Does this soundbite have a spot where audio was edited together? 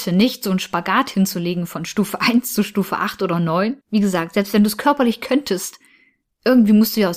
yes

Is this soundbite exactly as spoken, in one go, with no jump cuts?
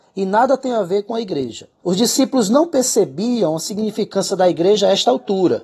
no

